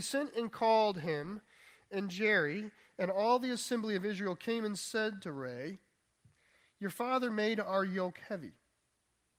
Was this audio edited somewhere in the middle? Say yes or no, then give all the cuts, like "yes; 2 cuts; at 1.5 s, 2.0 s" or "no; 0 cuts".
no; 0 cuts